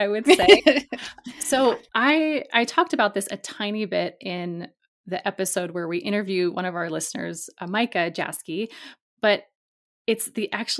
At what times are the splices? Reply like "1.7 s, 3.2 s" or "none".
1.9 s

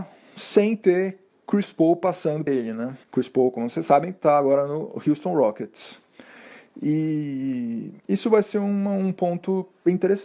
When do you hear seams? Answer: 2.5 s, 3.0 s, 8.0 s

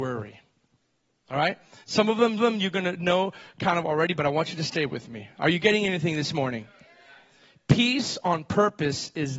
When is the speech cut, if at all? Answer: 2.4 s

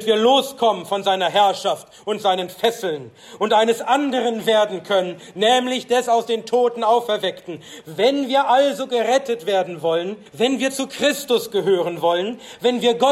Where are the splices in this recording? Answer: 10.3 s

